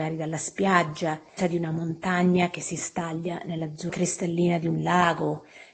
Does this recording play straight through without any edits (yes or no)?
no